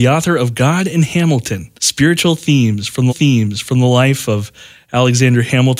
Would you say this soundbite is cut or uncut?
cut